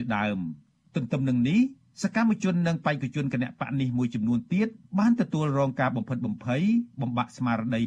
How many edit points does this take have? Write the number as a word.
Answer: one